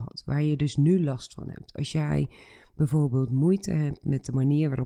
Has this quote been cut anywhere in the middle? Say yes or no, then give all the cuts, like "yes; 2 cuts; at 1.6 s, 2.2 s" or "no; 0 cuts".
no; 0 cuts